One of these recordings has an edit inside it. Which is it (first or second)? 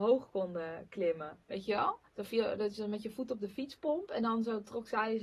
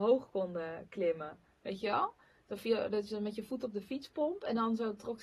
first